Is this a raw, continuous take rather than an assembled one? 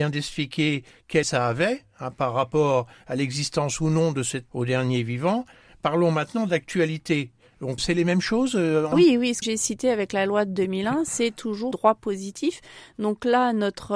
no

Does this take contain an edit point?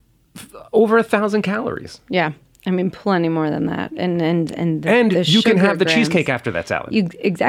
no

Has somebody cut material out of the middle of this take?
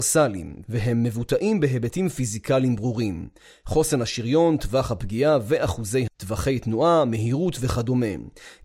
yes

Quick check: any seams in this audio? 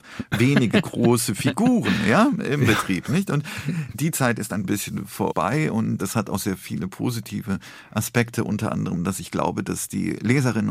yes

